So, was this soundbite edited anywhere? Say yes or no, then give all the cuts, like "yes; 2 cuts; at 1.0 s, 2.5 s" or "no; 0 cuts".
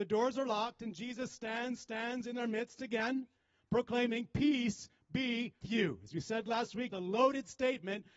yes; 3 cuts; at 1.8 s, 5.6 s, 6.9 s